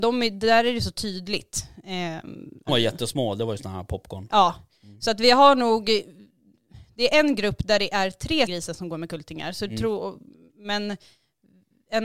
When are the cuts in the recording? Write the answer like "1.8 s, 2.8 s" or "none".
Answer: 2.7 s, 8.5 s

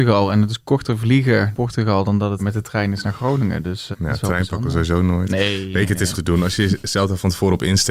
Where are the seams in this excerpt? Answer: 1.5 s, 2.4 s, 3.9 s, 6.1 s

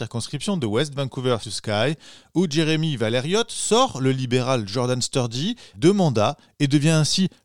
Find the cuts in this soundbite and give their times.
1.4 s, 5.7 s

